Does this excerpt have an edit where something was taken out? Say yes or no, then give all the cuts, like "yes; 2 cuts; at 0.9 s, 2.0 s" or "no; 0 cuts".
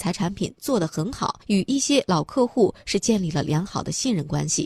yes; 1 cut; at 1.4 s